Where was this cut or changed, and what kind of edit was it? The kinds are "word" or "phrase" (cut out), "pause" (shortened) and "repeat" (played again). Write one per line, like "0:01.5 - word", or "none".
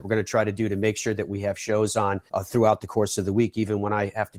0:02.3 - pause

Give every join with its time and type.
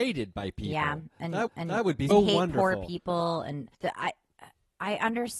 0:01.5 - repeat
0:02.1 - word
0:03.7 - pause

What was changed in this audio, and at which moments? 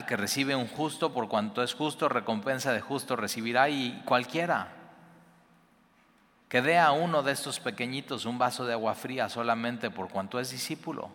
none

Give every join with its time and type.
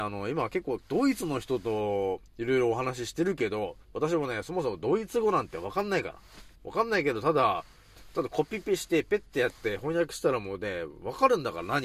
0:02.3 - pause
0:03.8 - pause
0:06.6 - pause

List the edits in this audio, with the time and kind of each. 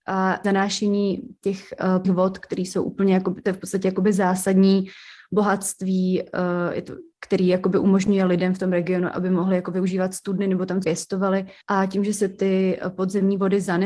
0:02.0 - word
0:10.8 - word
0:11.6 - pause

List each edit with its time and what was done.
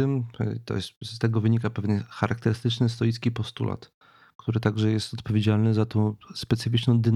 none

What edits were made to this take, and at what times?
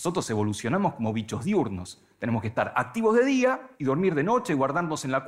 0:03.7 - pause

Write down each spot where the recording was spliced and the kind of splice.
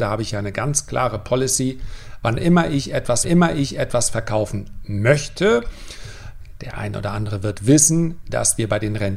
0:03.2 - repeat

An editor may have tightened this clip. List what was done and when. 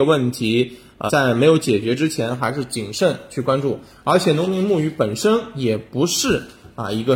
0:01.1 - word

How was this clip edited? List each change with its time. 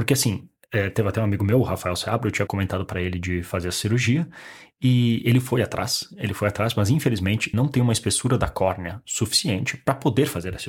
0:02.5 - word
0:07.5 - word

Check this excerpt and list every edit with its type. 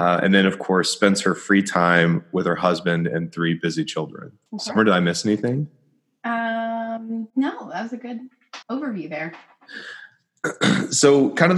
0:04.5 - pause
0:07.3 - pause
0:08.6 - pause

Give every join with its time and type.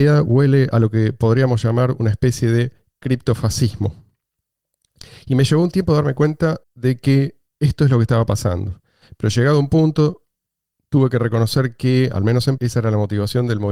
0:06.6 - pause
0:07.5 - pause
0:12.6 - word

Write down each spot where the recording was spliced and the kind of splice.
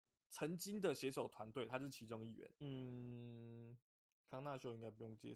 0:02.5 - pause

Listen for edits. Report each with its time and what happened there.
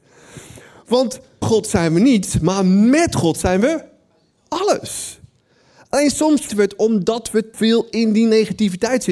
0:01.4 - word
0:06.5 - word
0:07.5 - word

